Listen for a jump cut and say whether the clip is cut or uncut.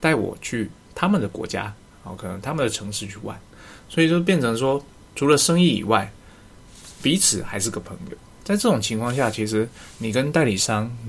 uncut